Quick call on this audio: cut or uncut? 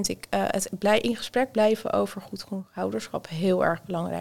uncut